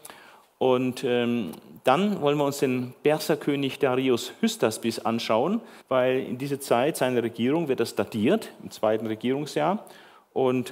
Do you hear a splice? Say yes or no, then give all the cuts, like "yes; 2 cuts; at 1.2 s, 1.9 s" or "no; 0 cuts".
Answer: yes; 1 cut; at 5.8 s